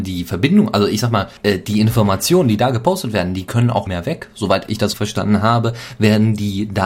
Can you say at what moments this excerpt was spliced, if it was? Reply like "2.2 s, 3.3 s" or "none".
1.4 s, 3.9 s, 4.9 s